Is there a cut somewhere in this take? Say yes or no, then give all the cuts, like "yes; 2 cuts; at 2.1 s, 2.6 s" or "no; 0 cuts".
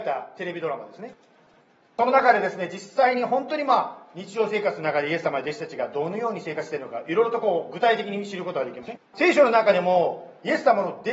yes; 1 cut; at 9.0 s